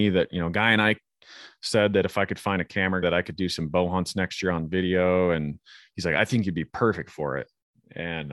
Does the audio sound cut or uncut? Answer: cut